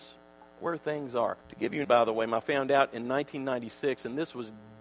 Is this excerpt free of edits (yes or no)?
no